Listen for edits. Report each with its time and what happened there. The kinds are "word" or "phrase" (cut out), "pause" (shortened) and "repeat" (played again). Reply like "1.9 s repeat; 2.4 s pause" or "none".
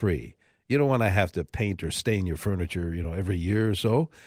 none

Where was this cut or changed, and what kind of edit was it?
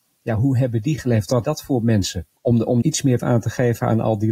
1.4 s word; 2.4 s pause; 2.8 s word; 3.2 s word

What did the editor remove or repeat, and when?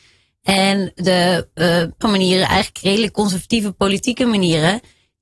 2.0 s word

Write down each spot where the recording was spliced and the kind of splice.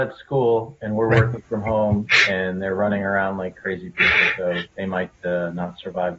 4.7 s pause

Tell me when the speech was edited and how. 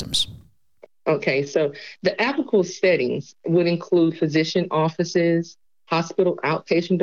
5.6 s pause

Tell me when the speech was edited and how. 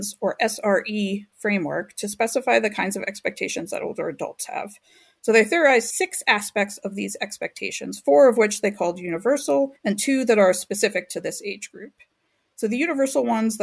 9.8 s pause

